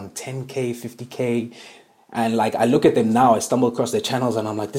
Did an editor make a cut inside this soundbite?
no; 0 cuts

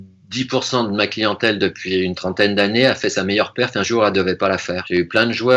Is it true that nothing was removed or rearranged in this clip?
yes; 0 cuts

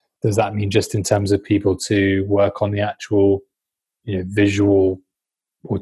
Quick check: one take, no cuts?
yes; 0 cuts

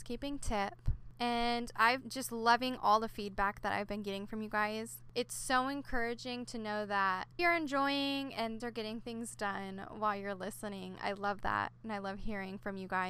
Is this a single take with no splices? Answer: no; 3 cuts; at 2.0 s, 7.4 s, 8.6 s

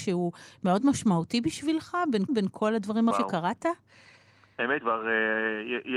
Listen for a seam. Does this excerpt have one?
yes; 3 cuts; at 2.3 s, 3.1 s, 4.8 s

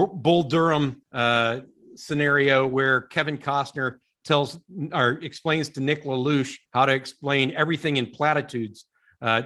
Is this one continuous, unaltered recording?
no; 2 cuts; at 1.0 s, 6.7 s

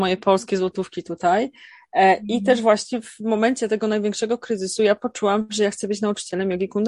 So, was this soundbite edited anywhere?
no; 0 cuts

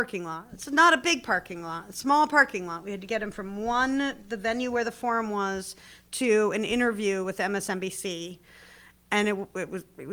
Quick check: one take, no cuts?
yes; 0 cuts

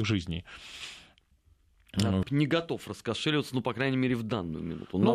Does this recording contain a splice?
yes; 1 cut; at 2.2 s

